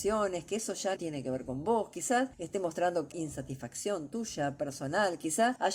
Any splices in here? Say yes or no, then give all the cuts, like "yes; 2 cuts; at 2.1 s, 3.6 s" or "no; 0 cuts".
yes; 2 cuts; at 1.0 s, 3.1 s